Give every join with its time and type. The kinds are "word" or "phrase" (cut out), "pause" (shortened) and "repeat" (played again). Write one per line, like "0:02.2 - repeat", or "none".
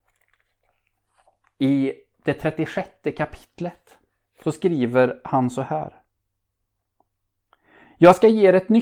none